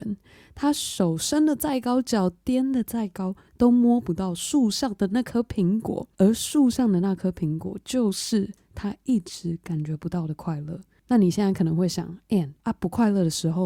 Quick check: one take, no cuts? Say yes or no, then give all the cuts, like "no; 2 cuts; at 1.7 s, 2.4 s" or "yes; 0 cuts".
no; 2 cuts; at 6.1 s, 12.6 s